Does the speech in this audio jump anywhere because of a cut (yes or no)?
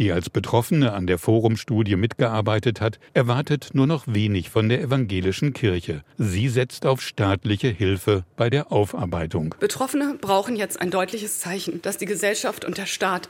yes